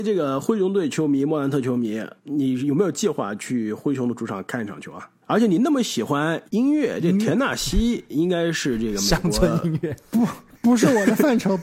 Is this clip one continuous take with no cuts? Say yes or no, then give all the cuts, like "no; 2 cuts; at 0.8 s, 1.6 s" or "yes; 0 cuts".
no; 3 cuts; at 2.2 s, 5.2 s, 6.5 s